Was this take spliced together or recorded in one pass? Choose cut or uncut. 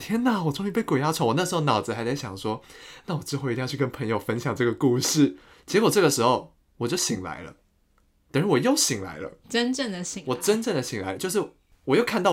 uncut